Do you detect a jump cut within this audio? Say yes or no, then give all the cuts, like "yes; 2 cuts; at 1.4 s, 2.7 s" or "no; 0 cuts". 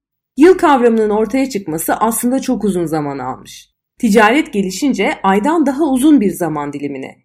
no; 0 cuts